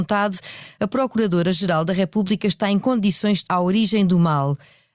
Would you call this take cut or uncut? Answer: cut